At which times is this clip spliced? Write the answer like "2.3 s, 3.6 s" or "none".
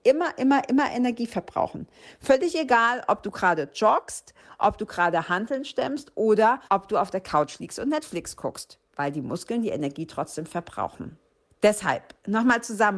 6.7 s, 8.9 s, 11.3 s